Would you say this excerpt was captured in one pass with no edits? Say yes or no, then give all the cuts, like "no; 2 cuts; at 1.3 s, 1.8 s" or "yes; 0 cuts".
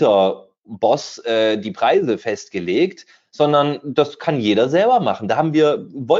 yes; 0 cuts